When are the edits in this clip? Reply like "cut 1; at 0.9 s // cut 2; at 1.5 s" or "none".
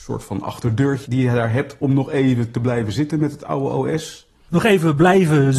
none